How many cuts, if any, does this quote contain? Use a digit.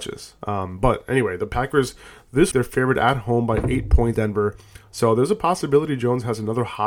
2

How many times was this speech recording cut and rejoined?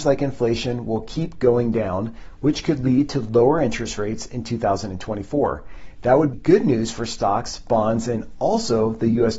1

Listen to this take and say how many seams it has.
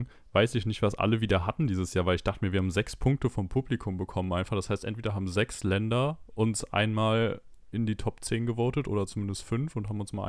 0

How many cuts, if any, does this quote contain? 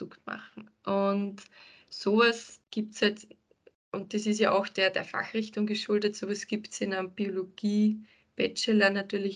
0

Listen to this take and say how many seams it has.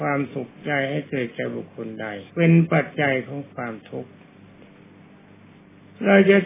1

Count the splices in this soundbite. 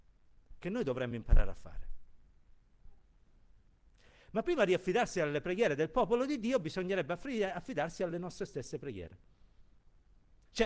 0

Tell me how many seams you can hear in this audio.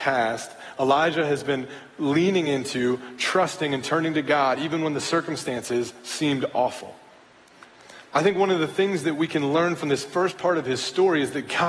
0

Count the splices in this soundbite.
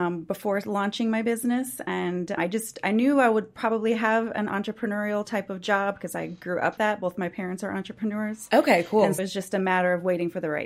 3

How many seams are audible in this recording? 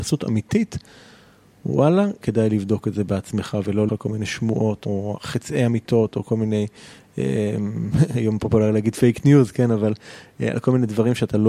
3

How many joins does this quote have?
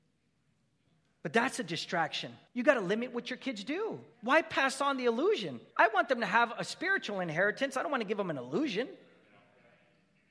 3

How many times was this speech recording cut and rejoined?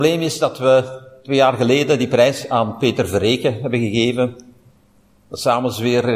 0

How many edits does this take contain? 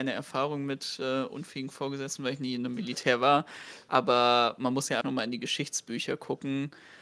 1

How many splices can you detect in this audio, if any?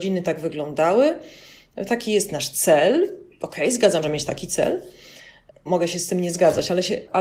1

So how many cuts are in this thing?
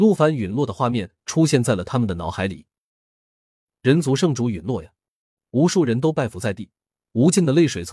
1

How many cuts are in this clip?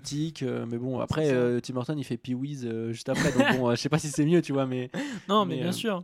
0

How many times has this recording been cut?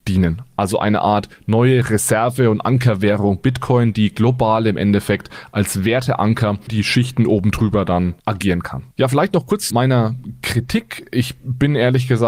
4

